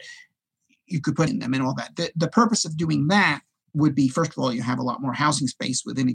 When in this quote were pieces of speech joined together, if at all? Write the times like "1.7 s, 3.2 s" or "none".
1.3 s, 3.6 s